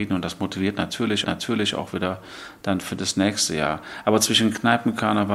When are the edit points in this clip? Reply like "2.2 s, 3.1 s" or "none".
1.2 s